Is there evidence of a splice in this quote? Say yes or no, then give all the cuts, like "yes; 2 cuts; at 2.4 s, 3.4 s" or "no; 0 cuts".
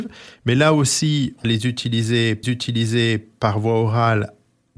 yes; 2 cuts; at 1.4 s, 2.4 s